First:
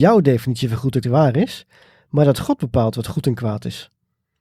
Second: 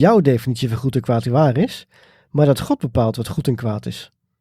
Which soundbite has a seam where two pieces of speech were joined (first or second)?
first